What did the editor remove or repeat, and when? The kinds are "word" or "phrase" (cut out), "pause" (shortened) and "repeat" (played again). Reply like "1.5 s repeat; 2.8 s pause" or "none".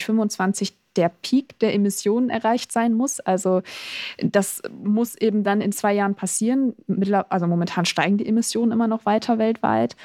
none

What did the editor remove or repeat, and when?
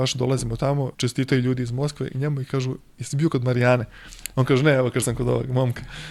0.9 s pause; 5.0 s word

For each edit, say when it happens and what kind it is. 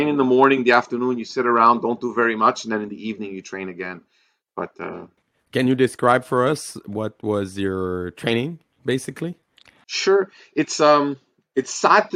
none

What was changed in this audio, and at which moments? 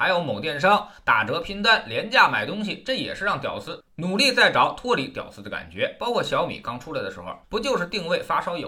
7.4 s pause

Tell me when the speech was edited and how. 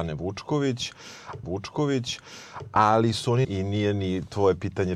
1.4 s repeat; 3.4 s phrase

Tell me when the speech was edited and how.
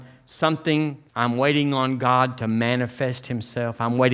1.1 s pause

